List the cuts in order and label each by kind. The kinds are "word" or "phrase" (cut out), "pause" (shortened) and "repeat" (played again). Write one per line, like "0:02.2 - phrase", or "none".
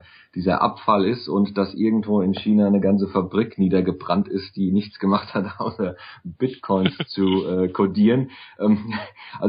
none